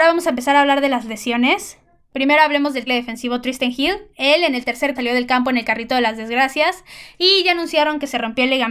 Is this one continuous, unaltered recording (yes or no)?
no